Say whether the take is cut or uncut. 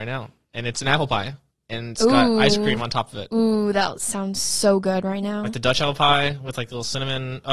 cut